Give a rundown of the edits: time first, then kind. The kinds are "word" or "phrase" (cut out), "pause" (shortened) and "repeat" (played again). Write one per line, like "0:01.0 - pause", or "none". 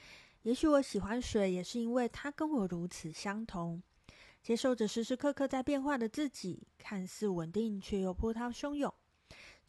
none